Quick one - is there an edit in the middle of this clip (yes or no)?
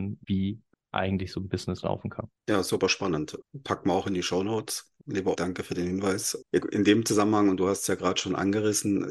yes